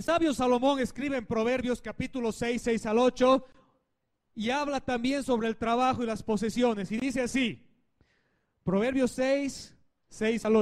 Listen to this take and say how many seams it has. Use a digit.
0